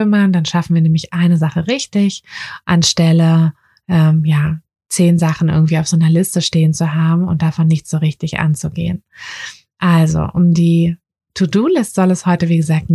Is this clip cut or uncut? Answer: uncut